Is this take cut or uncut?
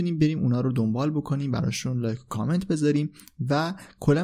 uncut